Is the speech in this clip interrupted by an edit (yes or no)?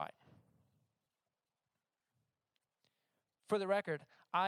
no